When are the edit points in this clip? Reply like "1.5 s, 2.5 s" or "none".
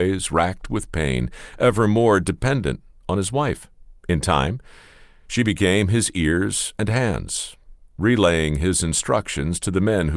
4.0 s

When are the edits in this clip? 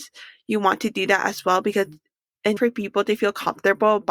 2.6 s

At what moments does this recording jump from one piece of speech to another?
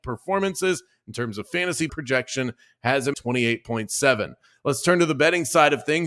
1.9 s, 3.1 s

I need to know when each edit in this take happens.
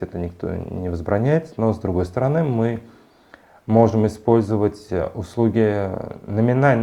none

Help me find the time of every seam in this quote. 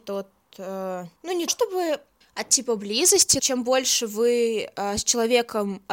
1.2 s, 1.5 s, 2.2 s, 3.4 s

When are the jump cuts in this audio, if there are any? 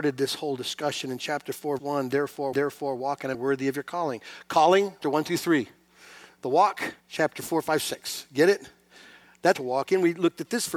1.8 s, 2.5 s, 3.3 s, 5.0 s, 7.0 s, 9.5 s

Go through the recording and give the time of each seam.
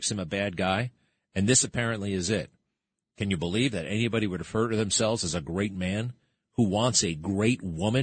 none

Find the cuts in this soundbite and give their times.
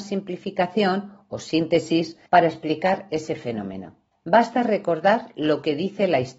2.3 s, 4.1 s

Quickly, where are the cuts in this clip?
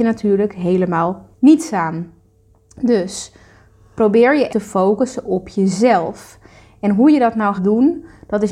1.3 s, 4.5 s, 7.6 s

